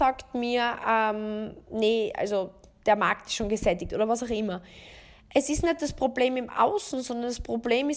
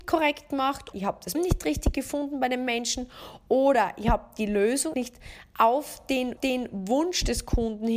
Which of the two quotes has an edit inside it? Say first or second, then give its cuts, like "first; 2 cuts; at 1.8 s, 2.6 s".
second; 4 cuts; at 0.9 s, 1.3 s, 4.9 s, 6.4 s